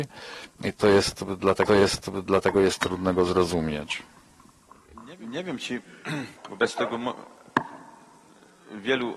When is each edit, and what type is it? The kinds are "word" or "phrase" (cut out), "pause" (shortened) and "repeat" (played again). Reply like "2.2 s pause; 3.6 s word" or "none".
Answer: 1.7 s repeat; 6.4 s pause